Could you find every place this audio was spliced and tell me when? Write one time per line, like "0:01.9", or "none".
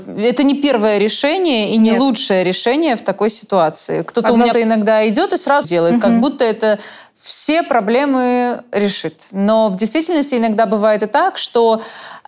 0:04.5
0:05.6